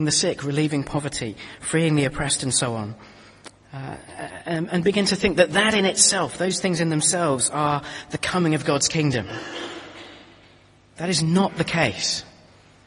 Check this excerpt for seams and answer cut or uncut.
uncut